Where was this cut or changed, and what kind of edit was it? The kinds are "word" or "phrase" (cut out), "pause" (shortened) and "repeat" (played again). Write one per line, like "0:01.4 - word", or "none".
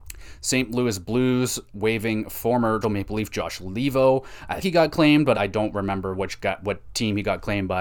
0:02.8 - word
0:04.6 - word
0:05.3 - word